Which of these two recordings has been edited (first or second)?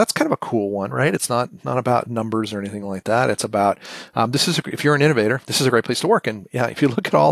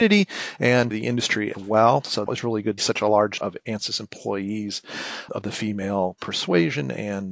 second